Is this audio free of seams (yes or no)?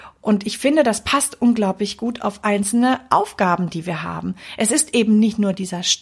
yes